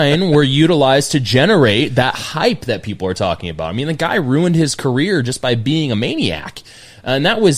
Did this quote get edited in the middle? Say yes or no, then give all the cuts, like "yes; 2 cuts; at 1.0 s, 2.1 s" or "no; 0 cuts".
no; 0 cuts